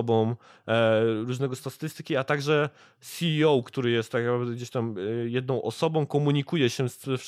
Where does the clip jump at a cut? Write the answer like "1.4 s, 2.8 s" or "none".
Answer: none